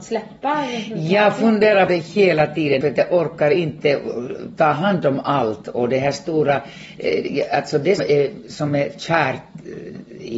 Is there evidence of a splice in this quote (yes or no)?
yes